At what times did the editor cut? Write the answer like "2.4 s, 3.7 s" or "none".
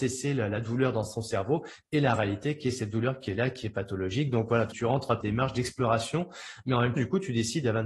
4.7 s, 5.2 s, 7.0 s